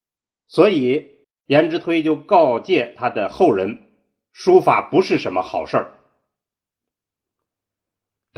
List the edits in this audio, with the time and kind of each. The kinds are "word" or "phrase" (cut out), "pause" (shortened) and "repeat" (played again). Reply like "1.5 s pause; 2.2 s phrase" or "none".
1.2 s pause